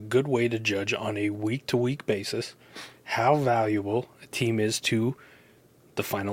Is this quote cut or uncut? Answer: uncut